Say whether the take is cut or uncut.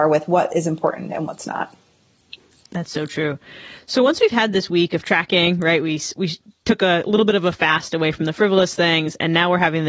uncut